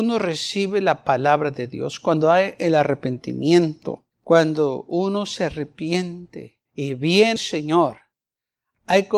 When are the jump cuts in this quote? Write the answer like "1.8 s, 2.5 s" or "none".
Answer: 4.1 s, 6.7 s, 7.4 s